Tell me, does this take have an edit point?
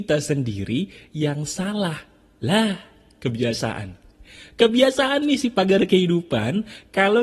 no; 0 cuts

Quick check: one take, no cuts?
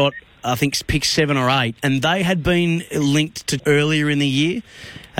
no; 1 cut; at 3.6 s

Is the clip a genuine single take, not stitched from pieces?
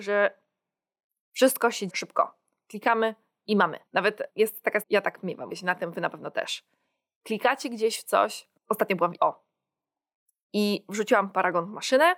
no; 6 cuts; at 1.9 s, 3.9 s, 4.8 s, 5.5 s, 8.6 s, 9.2 s

